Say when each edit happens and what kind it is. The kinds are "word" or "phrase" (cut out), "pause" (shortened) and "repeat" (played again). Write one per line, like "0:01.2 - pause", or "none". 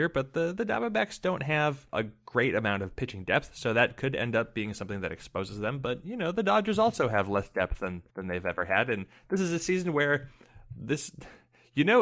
0:08.1 - pause